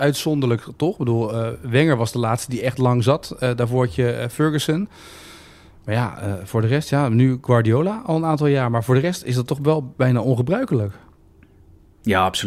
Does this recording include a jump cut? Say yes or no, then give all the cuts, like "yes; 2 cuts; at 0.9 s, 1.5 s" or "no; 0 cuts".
no; 0 cuts